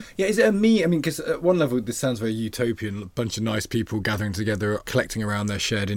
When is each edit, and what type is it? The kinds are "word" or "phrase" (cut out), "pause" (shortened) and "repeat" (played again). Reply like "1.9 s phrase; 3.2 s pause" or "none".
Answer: 4.8 s word